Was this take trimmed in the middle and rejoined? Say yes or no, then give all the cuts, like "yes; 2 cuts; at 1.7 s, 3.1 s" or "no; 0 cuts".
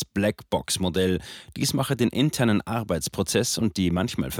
no; 0 cuts